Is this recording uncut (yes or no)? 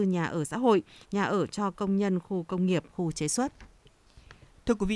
yes